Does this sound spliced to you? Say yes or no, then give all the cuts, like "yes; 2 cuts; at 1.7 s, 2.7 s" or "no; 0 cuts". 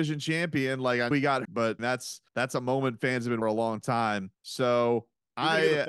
yes; 6 cuts; at 1.1 s, 1.4 s, 1.8 s, 2.3 s, 3.4 s, 4.3 s